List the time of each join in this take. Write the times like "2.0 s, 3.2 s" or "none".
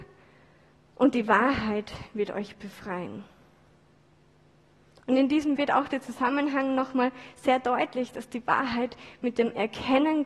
5.6 s

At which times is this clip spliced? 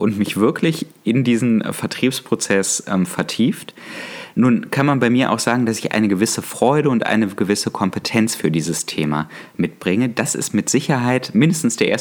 none

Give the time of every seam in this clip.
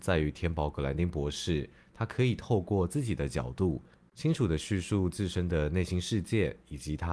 none

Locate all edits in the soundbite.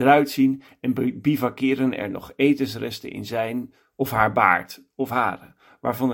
none

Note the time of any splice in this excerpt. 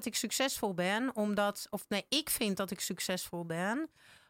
none

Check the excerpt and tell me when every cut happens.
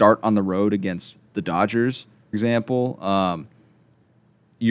2.3 s

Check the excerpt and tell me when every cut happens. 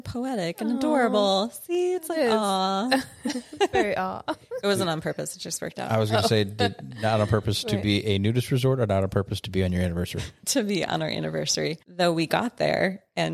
11.8 s

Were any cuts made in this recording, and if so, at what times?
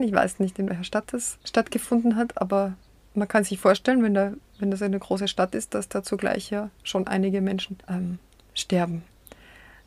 1.4 s, 7.8 s

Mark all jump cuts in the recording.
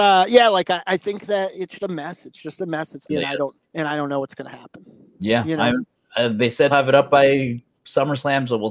1.8 s, 3.1 s, 3.6 s, 6.7 s

